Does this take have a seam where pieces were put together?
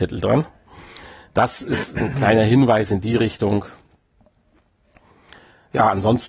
no; 0 cuts

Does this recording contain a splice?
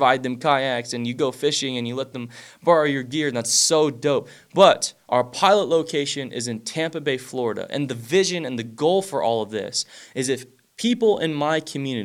no; 0 cuts

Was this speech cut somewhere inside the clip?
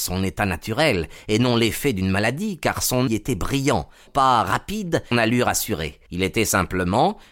yes; 4 cuts; at 3.1 s, 4.1 s, 5.1 s, 6.1 s

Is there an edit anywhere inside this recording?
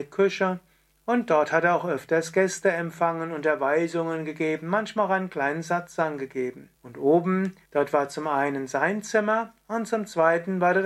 yes; 2 cuts; at 6.7 s, 7.6 s

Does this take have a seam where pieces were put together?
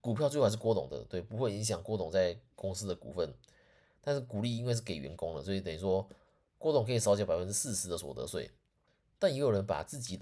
no; 0 cuts

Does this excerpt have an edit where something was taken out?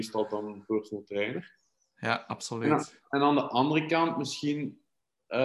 no; 0 cuts

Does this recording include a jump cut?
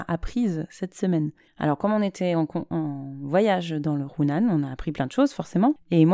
yes; 1 cut; at 1.5 s

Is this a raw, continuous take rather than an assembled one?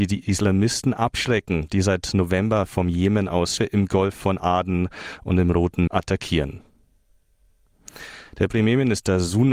no; 3 cuts; at 3.6 s, 5.9 s, 8.5 s

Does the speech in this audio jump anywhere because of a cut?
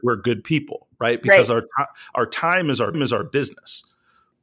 yes; 1 cut; at 2.9 s

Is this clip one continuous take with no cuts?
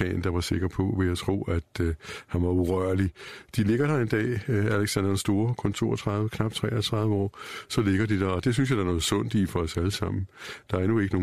yes; 0 cuts

